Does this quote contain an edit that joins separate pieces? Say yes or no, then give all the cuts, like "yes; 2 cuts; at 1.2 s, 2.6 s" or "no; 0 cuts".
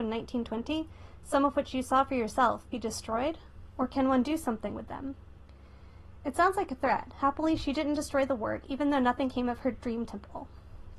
no; 0 cuts